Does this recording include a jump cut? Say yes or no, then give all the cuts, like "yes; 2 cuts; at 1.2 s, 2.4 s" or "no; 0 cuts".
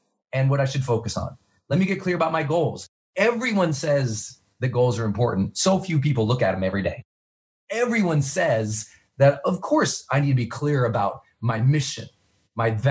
no; 0 cuts